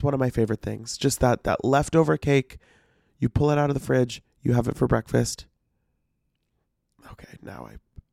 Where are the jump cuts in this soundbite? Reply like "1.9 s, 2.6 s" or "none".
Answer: none